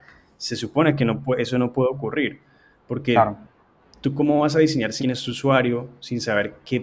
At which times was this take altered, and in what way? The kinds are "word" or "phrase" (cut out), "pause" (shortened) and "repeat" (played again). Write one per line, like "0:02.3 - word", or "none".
0:05.0 - word